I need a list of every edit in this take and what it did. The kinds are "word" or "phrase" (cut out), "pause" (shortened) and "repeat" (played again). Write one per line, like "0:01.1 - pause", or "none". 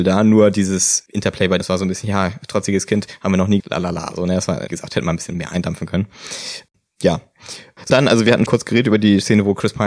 0:01.6 - word
0:03.6 - word
0:04.7 - word
0:07.9 - word
0:08.5 - word